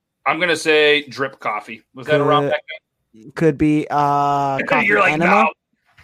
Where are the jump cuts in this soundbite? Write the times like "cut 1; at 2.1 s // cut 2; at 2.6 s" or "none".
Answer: cut 1; at 1.9 s